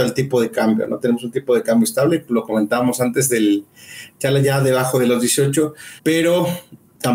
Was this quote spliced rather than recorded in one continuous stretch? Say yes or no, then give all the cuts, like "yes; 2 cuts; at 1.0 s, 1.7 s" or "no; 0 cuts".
yes; 1 cut; at 6.0 s